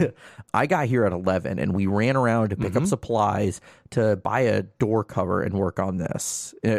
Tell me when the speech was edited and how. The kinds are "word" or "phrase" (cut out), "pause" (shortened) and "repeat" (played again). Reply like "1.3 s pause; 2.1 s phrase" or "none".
none